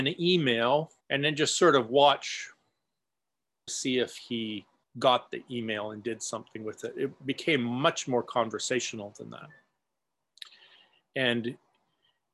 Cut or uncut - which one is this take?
cut